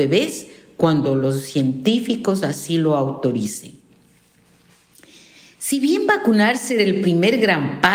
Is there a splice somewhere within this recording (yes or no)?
no